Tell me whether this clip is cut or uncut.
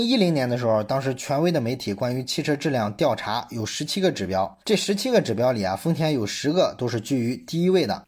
cut